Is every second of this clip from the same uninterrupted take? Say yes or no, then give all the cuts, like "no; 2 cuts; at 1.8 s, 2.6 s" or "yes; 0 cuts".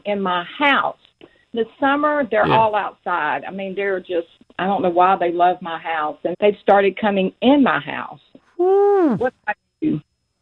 no; 2 cuts; at 1.5 s, 6.3 s